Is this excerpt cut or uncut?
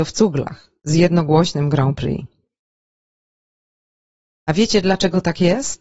uncut